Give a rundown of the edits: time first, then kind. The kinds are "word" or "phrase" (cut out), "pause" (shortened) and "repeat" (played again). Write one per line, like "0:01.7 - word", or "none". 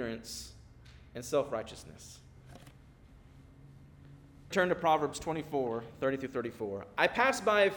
0:04.5 - word